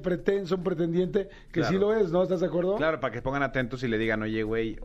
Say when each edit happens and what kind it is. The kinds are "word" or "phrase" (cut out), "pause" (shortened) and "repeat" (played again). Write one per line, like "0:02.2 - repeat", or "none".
none